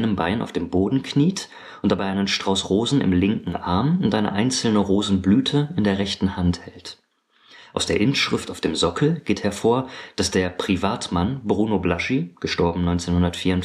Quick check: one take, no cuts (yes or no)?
yes